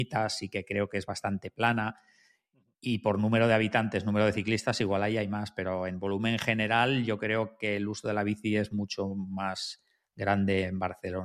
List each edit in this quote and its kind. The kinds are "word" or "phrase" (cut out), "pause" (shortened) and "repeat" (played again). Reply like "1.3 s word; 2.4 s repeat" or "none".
none